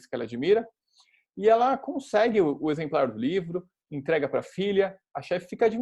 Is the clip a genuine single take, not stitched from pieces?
yes; 0 cuts

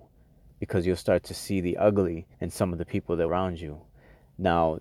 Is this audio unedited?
no; 2 cuts; at 2.3 s, 3.3 s

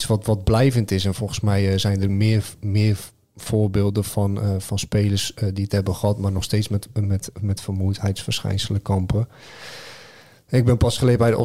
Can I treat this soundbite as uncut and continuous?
yes; 0 cuts

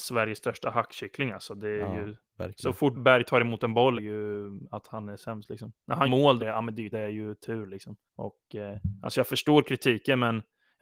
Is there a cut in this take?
yes; 6 cuts; at 2.9 s, 3.9 s, 6.0 s, 6.4 s, 6.9 s, 8.1 s

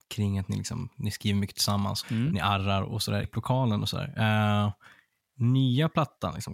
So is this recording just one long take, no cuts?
no; 2 cuts; at 2.0 s, 3.2 s

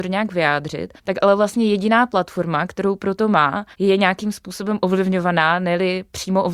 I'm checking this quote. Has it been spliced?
yes; 2 cuts; at 1.0 s, 3.7 s

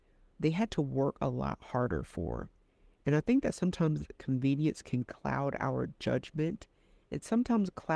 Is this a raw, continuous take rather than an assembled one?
yes; 0 cuts

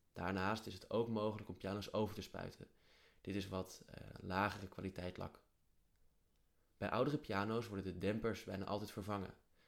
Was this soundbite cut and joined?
no; 0 cuts

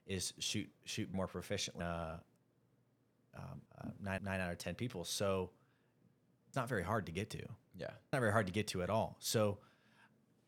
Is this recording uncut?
no; 6 cuts; at 1.1 s, 1.8 s, 3.7 s, 4.2 s, 6.5 s, 8.1 s

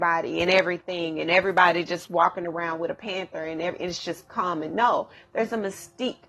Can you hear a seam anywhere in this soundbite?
no; 0 cuts

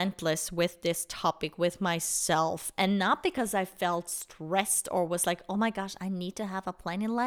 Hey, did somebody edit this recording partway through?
no; 0 cuts

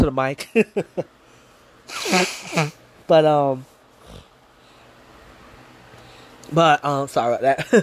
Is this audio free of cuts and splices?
yes; 0 cuts

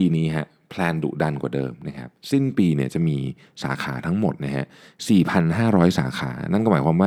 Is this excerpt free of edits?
yes; 0 cuts

